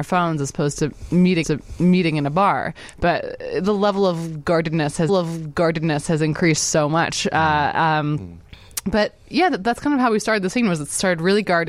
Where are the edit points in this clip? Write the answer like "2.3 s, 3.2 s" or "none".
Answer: 1.4 s, 5.1 s

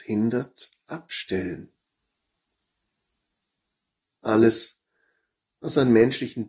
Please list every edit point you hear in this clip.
none

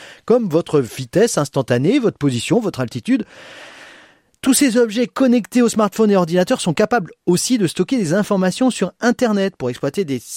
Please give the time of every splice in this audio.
none

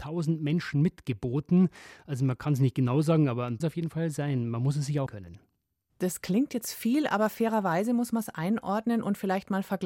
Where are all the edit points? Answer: 3.6 s, 5.1 s

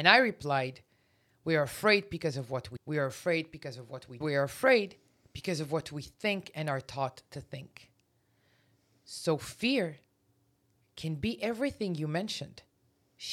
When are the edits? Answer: 2.8 s, 4.2 s

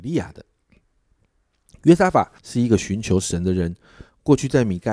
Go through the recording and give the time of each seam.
2.4 s

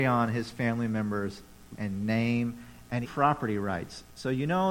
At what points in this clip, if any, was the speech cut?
1.7 s, 3.0 s

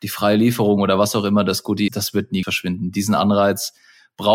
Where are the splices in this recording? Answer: 1.9 s, 2.4 s

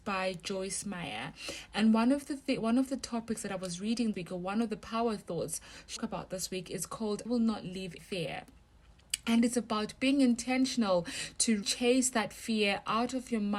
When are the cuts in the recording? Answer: 4.1 s, 6.0 s, 7.3 s, 8.0 s, 11.6 s

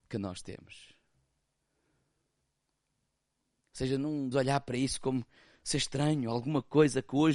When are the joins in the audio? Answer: 4.3 s

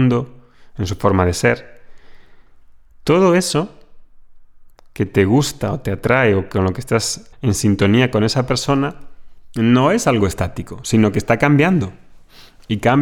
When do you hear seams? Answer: 7.3 s

